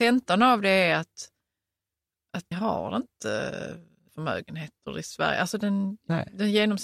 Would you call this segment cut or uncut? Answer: cut